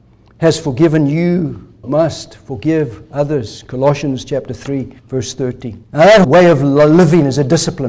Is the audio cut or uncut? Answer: cut